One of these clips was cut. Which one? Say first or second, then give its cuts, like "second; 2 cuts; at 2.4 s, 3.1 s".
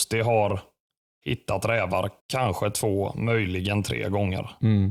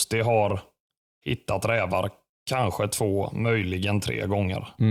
first; 1 cut; at 2.2 s